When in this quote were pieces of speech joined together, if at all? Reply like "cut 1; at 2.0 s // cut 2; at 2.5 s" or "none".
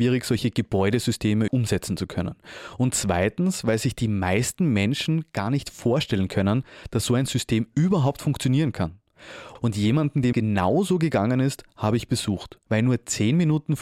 cut 1; at 1.5 s // cut 2; at 10.3 s